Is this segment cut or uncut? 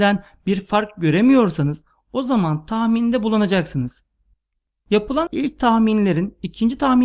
cut